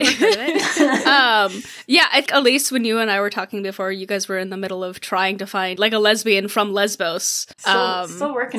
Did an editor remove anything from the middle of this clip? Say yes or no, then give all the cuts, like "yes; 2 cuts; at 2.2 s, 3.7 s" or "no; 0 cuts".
yes; 3 cuts; at 2.3 s, 5.8 s, 7.5 s